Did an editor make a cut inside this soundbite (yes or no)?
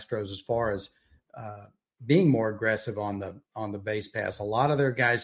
no